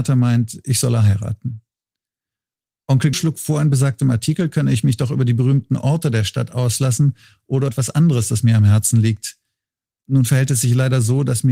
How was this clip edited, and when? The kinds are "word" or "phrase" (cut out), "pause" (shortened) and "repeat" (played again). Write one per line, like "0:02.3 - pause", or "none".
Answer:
0:03.1 - word
0:07.7 - word

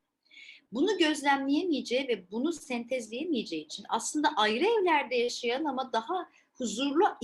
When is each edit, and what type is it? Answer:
none

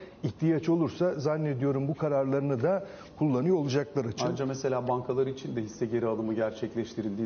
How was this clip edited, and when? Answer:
none

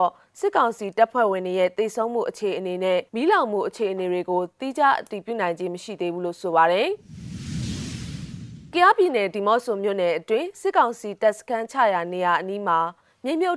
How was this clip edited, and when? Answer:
0:03.1 - pause

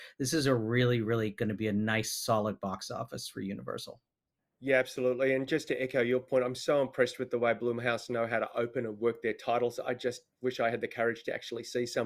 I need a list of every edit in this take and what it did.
none

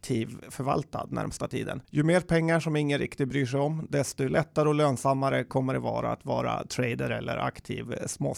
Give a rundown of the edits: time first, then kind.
0:01.8 - pause

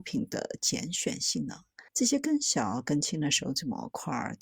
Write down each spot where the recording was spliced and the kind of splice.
0:01.9 - pause

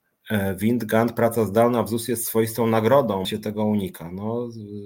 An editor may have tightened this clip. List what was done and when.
0:03.2 - word

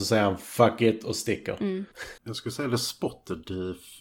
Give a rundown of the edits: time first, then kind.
0:02.2 - pause

